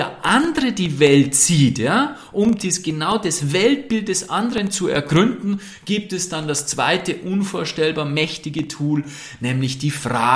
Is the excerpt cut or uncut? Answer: uncut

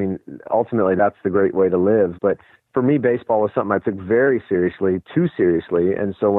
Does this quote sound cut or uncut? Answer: cut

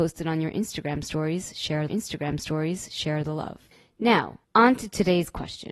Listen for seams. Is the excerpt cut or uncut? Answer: cut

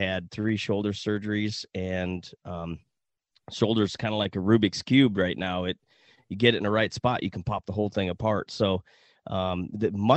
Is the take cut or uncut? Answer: uncut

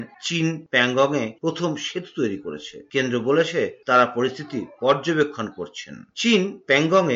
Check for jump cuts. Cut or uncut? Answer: uncut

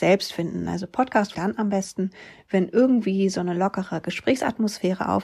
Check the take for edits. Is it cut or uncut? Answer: cut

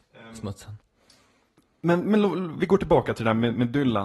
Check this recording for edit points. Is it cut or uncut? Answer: uncut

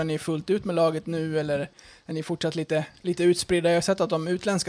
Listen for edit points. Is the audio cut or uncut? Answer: uncut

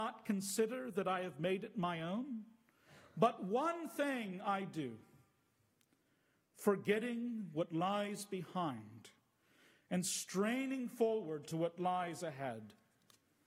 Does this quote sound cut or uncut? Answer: uncut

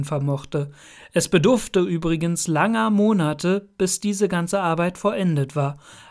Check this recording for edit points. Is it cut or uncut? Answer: uncut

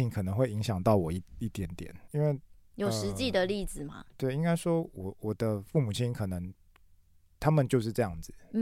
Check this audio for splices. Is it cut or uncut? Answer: cut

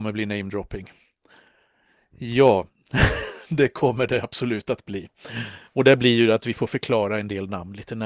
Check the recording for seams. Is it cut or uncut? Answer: uncut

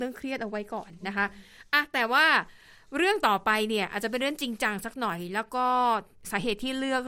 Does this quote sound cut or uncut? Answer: uncut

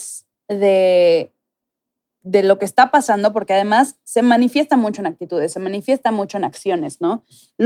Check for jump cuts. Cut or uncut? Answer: cut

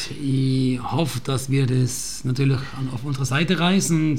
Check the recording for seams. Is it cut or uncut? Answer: uncut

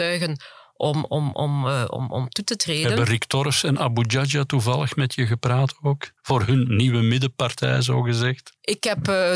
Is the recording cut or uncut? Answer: cut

